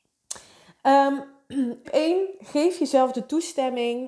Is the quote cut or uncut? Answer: cut